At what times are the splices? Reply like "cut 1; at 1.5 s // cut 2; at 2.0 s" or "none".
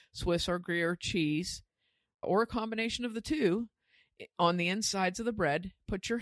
cut 1; at 2.2 s